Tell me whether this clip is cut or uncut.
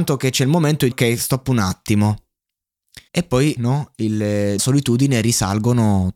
cut